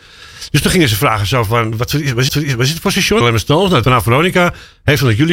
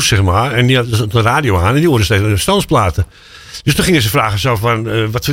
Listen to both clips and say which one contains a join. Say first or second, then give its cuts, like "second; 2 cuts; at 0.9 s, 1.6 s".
first; 4 cuts; at 1.7 s, 2.3 s, 3.2 s, 3.8 s